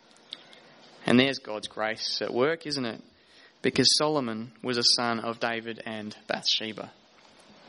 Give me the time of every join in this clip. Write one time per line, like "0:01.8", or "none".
none